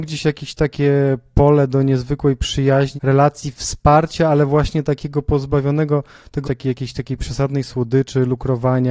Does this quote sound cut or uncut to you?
cut